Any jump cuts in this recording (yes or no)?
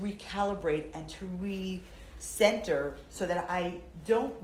no